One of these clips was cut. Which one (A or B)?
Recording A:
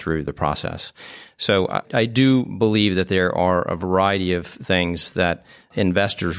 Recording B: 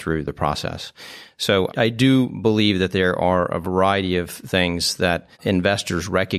B